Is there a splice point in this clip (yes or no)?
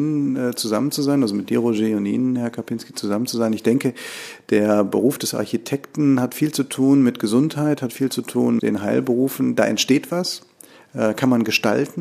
yes